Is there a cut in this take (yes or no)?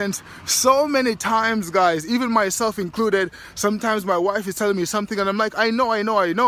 no